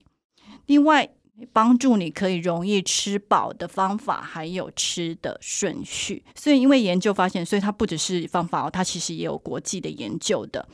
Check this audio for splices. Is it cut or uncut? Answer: cut